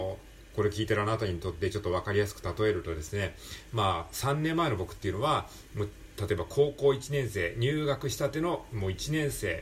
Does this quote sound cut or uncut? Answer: cut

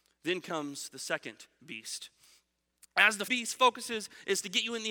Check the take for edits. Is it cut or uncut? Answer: cut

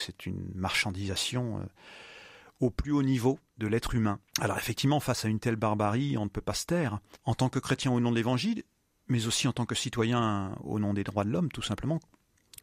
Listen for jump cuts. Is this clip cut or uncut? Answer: uncut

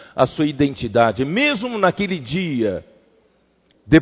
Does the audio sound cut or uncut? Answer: uncut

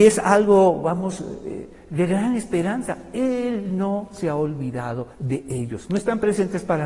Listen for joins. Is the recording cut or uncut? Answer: cut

